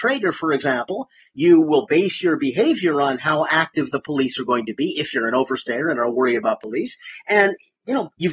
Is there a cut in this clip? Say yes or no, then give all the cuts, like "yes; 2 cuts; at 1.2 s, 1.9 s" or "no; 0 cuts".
no; 0 cuts